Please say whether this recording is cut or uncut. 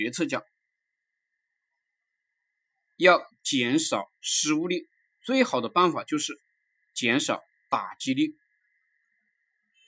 uncut